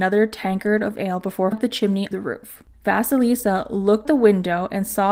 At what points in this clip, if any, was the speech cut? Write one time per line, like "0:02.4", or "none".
0:01.5
0:02.1
0:04.0